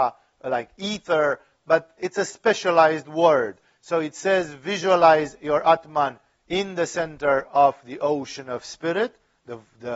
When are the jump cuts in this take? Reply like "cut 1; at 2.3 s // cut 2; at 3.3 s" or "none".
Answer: none